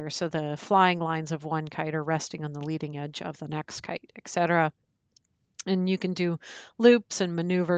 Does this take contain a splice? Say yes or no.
no